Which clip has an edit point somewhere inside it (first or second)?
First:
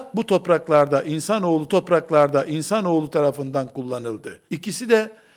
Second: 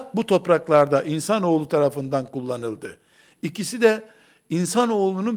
first